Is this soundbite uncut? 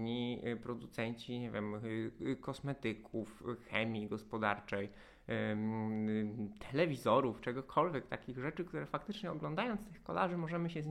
yes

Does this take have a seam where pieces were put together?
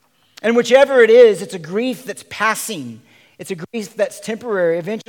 no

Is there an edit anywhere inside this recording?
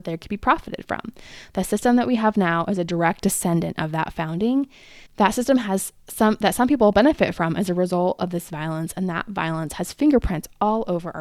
yes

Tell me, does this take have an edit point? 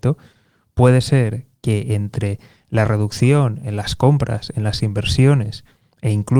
no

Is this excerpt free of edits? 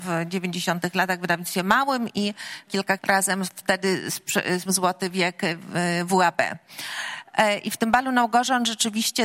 no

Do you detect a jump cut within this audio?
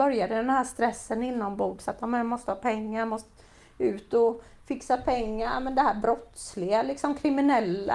no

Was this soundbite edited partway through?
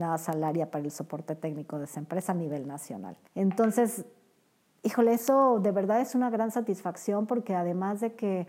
yes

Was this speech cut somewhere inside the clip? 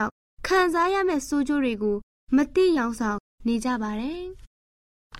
no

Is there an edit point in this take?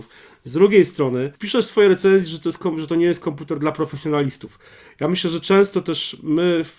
no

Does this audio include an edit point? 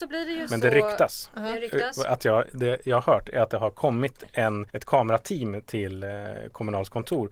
yes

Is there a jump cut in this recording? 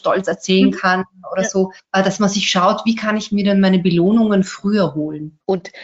no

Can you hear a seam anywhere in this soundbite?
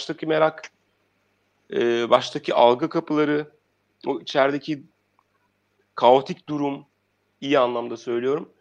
no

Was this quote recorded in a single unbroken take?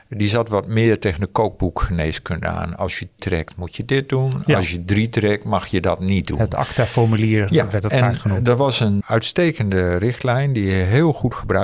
no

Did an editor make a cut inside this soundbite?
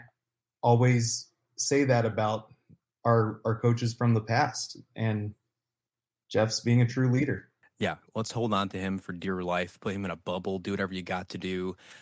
no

